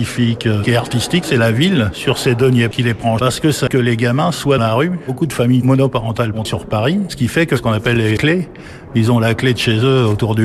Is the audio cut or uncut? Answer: cut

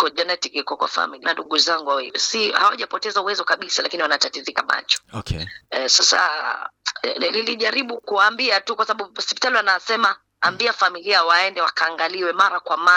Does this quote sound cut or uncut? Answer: cut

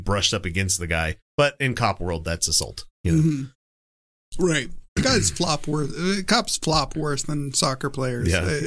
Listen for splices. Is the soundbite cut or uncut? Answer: cut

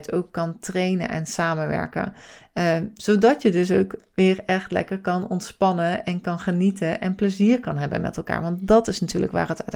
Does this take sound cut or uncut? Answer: uncut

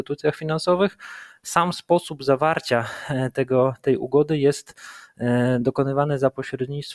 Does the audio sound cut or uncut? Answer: uncut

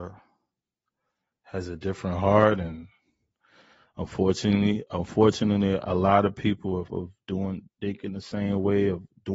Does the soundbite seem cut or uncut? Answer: cut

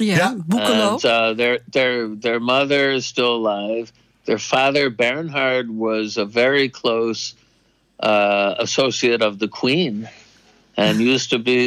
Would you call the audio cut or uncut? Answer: uncut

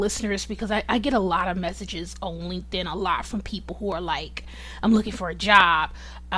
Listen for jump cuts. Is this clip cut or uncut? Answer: uncut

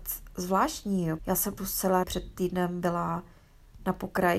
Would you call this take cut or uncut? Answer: cut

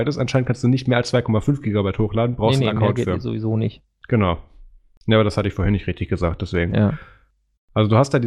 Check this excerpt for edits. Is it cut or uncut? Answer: uncut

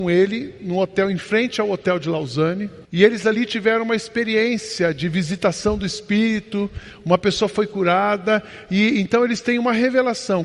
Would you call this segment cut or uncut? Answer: cut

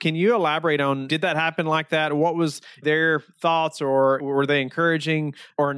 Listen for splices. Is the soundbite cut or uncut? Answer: uncut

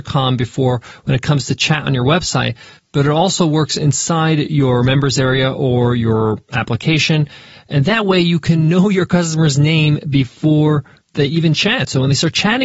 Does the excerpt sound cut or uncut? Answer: uncut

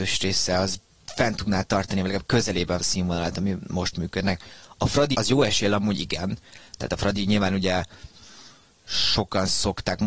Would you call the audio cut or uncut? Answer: cut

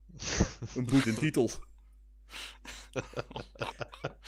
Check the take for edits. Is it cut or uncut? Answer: cut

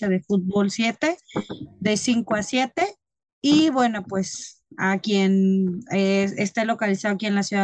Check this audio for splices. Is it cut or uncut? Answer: uncut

